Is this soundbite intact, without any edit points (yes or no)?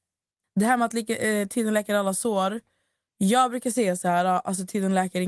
yes